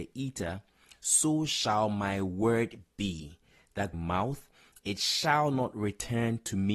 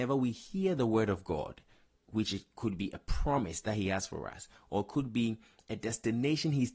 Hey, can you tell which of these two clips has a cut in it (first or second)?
first